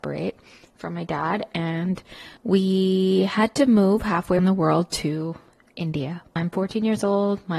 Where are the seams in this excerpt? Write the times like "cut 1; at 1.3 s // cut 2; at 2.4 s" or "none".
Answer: cut 1; at 2.4 s // cut 2; at 4.4 s // cut 3; at 6.4 s